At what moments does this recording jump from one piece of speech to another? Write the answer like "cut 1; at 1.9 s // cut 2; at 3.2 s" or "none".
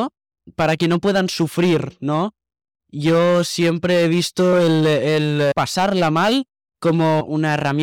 none